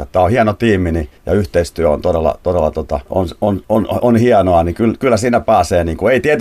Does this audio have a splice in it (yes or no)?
yes